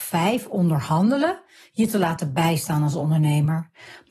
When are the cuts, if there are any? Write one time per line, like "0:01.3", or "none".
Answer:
none